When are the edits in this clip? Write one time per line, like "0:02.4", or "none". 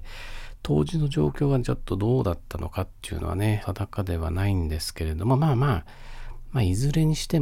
0:03.6